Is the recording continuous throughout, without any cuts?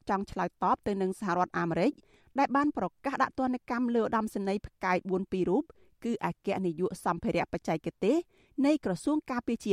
yes; 0 cuts

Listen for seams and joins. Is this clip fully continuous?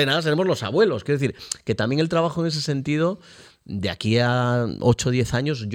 yes; 0 cuts

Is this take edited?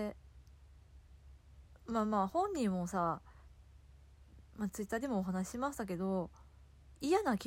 no; 0 cuts

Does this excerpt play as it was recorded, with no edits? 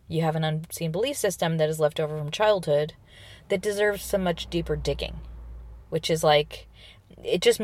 no; 1 cut; at 5.8 s

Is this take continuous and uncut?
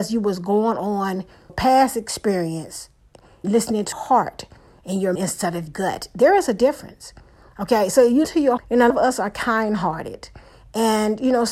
no; 8 cuts; at 1.5 s, 3.4 s, 3.9 s, 5.2 s, 5.7 s, 8.2 s, 8.6 s, 8.9 s

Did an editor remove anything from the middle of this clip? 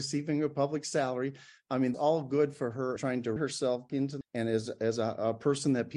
yes; 5 cuts; at 1.9 s, 3.0 s, 3.4 s, 3.9 s, 4.2 s

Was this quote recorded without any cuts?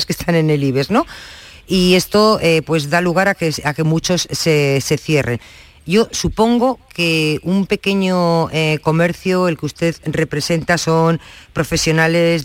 yes; 0 cuts

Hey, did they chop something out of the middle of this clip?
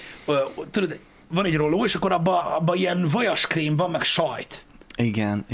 no; 0 cuts

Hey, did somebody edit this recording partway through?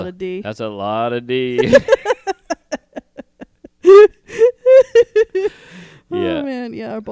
no; 0 cuts

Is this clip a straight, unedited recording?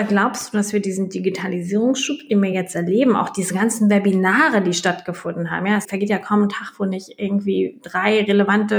yes; 0 cuts

